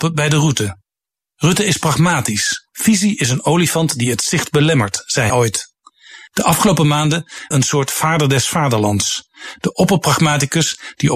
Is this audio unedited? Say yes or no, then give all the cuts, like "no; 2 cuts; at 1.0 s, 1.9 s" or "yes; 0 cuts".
no; 3 cuts; at 2.7 s, 5.3 s, 7.5 s